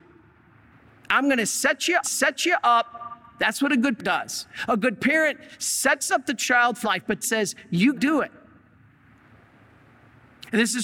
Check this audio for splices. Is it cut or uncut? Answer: cut